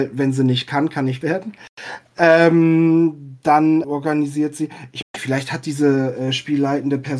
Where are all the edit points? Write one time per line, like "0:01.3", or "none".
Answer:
0:01.2
0:03.8
0:05.0